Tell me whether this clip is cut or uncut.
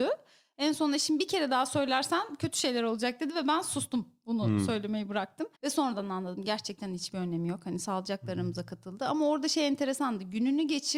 cut